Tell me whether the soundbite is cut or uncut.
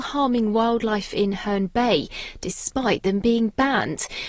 uncut